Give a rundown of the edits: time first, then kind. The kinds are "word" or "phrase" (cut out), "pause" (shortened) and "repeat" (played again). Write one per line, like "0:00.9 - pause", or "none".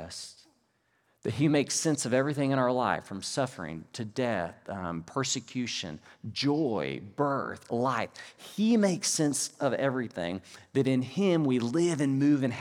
none